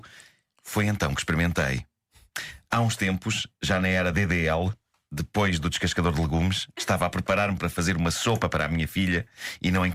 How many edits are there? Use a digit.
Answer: 0